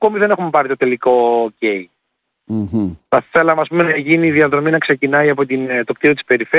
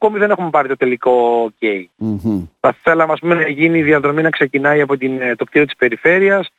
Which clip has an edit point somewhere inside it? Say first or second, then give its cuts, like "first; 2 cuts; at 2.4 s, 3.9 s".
second; 1 cut; at 1.9 s